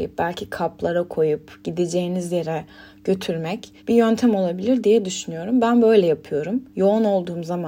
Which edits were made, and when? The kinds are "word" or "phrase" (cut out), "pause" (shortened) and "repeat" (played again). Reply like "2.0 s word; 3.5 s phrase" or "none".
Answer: 3.8 s pause; 6.7 s pause